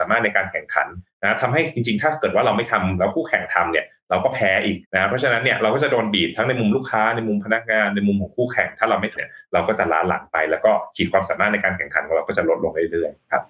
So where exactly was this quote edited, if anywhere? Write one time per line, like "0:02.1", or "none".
0:04.8
0:09.2